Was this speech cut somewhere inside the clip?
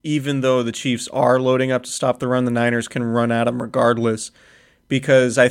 no; 0 cuts

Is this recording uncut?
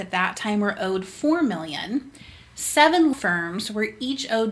no; 1 cut; at 3.1 s

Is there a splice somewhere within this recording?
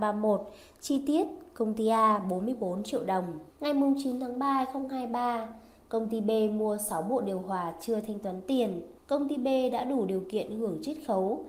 yes; 2 cuts; at 3.5 s, 9.0 s

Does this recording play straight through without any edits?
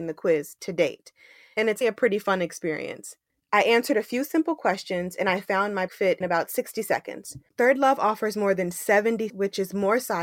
no; 4 cuts; at 1.8 s, 5.9 s, 6.2 s, 9.3 s

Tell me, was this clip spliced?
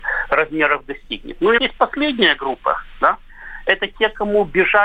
yes; 1 cut; at 1.6 s

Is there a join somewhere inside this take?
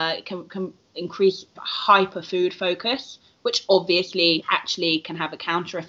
yes; 1 cut; at 1.6 s

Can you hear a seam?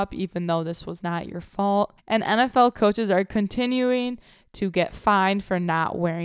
no; 0 cuts

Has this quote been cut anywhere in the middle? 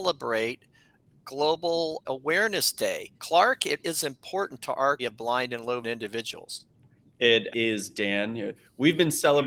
yes; 6 cuts; at 2.0 s, 3.2 s, 3.8 s, 5.0 s, 5.8 s, 7.5 s

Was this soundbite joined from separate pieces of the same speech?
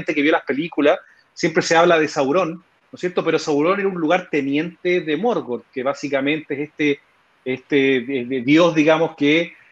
no; 0 cuts

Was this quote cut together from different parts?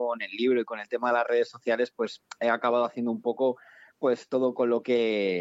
no; 0 cuts

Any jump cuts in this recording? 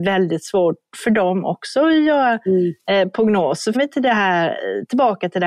yes; 1 cut; at 3.7 s

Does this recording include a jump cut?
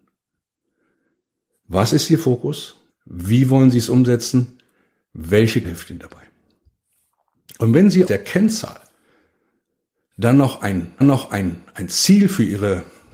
yes; 4 cuts; at 2.9 s, 5.6 s, 8.1 s, 11.0 s

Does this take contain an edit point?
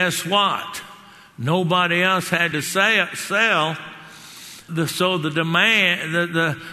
yes; 2 cuts; at 2.5 s, 4.7 s

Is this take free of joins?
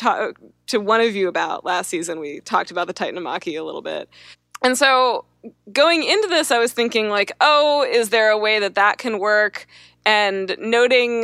yes; 0 cuts

